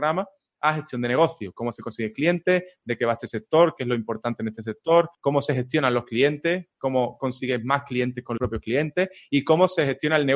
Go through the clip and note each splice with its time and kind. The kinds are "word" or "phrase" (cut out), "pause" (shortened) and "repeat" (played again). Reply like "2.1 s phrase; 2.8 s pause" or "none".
5.1 s pause; 8.4 s word